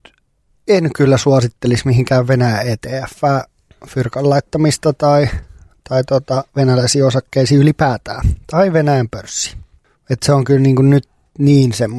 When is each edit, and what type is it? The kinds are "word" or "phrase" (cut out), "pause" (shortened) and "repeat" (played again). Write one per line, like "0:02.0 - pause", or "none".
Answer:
none